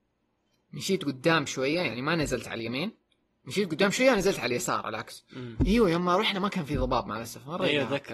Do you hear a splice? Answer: no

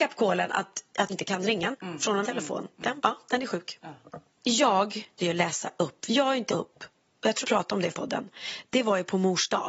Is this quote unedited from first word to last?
no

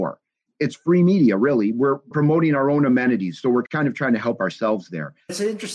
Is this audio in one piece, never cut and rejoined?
yes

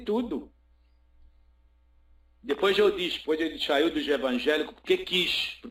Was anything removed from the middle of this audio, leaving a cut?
no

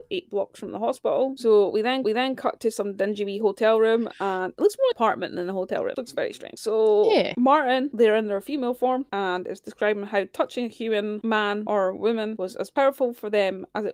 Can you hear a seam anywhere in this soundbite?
yes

